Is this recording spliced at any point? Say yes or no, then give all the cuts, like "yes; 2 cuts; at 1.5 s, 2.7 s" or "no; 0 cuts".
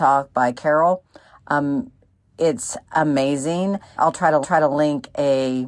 yes; 2 cuts; at 4.0 s, 4.4 s